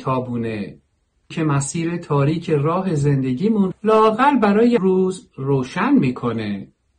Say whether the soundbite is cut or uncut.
cut